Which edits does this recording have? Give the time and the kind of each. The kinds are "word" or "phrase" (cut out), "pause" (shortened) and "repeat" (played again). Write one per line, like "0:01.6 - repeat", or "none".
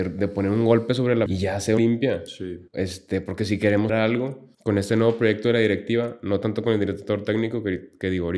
0:01.3 - word
0:01.8 - phrase
0:02.7 - pause
0:03.9 - word
0:04.5 - pause